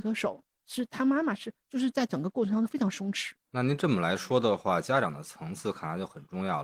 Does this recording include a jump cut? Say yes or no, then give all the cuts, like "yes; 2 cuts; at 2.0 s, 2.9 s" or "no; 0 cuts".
yes; 1 cut; at 3.4 s